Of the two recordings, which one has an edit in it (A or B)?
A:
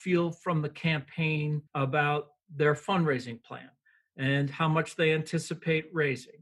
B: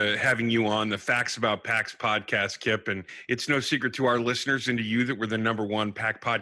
A